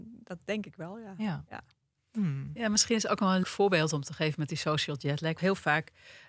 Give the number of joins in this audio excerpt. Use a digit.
2